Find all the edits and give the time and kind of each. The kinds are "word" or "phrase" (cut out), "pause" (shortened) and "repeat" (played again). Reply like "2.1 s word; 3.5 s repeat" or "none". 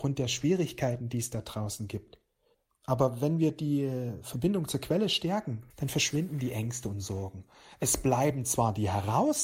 2.5 s pause; 5.7 s pause